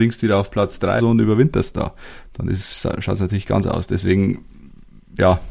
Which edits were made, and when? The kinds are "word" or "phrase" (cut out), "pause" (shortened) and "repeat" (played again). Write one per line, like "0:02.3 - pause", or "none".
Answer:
0:01.0 - word
0:03.6 - word